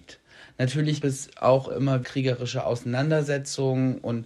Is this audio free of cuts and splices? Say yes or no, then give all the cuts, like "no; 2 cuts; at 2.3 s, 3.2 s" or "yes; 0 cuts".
no; 3 cuts; at 1.0 s, 1.7 s, 2.0 s